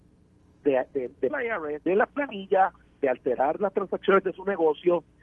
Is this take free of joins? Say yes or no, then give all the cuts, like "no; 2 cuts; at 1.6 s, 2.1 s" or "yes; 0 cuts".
no; 3 cuts; at 1.3 s, 1.9 s, 4.2 s